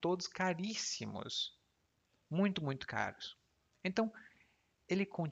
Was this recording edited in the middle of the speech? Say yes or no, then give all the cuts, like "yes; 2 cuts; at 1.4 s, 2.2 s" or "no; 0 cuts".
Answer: no; 0 cuts